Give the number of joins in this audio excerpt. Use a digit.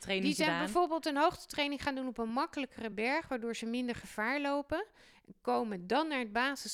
0